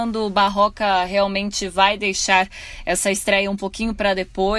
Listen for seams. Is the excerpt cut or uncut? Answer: uncut